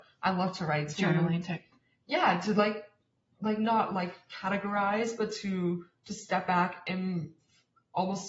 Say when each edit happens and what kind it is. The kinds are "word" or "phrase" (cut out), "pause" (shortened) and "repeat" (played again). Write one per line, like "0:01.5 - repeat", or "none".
none